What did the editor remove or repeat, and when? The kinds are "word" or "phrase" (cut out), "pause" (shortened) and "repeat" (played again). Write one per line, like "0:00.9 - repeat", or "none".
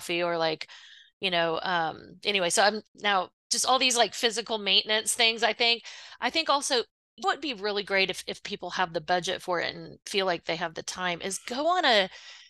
0:07.2 - word

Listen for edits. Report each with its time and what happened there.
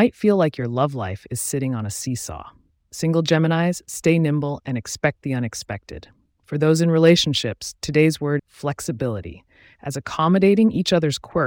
0:08.4 - word

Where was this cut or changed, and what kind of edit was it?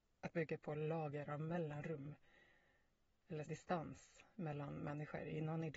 0:03.5 - word

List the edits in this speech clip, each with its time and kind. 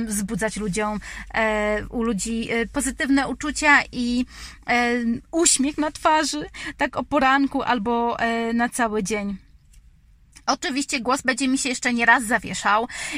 none

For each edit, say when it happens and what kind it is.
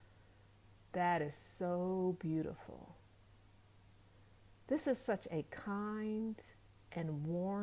none

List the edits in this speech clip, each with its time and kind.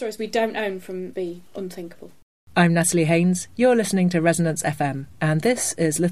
0:01.1 - phrase

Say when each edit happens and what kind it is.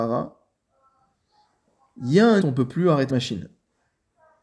0:02.4 - phrase
0:03.1 - word

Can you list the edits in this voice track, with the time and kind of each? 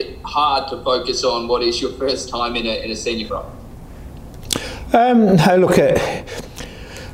0:03.3 - word

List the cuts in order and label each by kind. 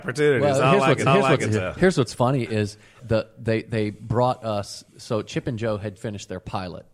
0:01.1 - repeat
0:03.0 - word
0:04.9 - pause
0:06.0 - word

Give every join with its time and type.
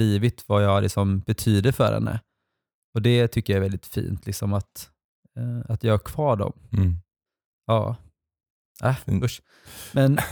none

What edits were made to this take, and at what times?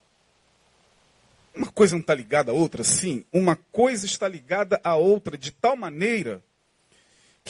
none

